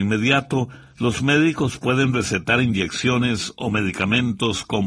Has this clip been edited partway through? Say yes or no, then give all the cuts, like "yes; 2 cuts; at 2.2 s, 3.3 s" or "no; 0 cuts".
no; 0 cuts